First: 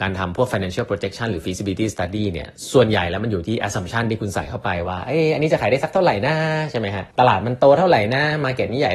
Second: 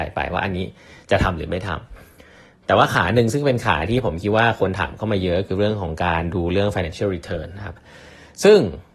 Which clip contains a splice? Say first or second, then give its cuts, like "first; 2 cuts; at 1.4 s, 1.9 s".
first; 1 cut; at 7.1 s